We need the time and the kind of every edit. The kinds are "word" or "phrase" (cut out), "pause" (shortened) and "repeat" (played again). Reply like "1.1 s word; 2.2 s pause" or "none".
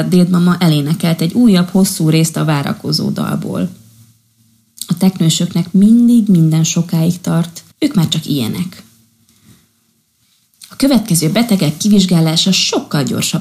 7.7 s pause